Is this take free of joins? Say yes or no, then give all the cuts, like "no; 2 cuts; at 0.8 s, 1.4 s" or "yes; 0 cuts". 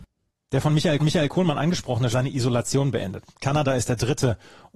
no; 2 cuts; at 1.0 s, 2.1 s